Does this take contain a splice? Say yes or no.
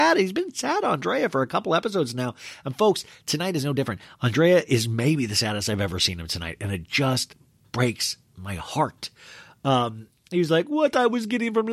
no